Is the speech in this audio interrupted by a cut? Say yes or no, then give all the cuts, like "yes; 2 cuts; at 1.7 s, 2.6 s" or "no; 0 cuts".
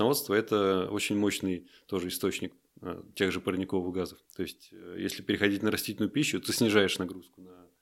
yes; 1 cut; at 4.2 s